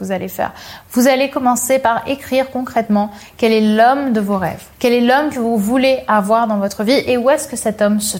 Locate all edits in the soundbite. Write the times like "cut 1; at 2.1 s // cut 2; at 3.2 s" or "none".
cut 1; at 4.7 s